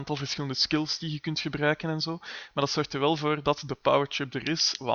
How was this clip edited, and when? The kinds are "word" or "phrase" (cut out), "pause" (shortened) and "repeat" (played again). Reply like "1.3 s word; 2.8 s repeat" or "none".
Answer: none